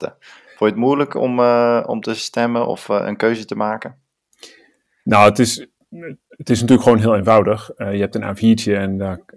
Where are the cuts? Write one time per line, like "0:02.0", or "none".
none